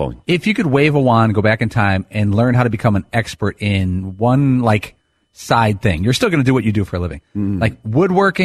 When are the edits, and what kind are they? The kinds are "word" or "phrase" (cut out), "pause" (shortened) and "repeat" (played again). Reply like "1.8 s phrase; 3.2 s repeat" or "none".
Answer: none